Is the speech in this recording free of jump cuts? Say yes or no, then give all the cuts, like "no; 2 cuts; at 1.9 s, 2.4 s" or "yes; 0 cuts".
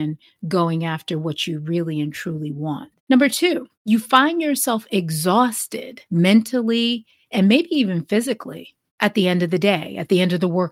no; 4 cuts; at 3.0 s, 3.7 s, 6.1 s, 8.9 s